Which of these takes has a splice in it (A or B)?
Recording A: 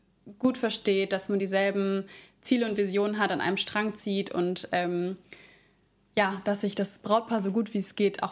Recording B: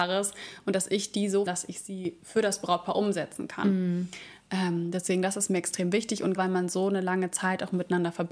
B